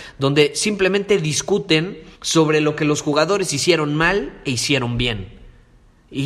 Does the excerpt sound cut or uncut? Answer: cut